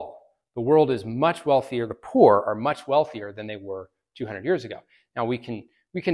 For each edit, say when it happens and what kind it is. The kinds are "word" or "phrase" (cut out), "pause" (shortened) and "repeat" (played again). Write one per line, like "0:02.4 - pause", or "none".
none